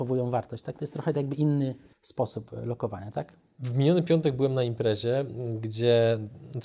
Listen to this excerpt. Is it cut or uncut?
cut